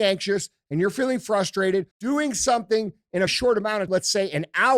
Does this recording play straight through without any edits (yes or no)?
no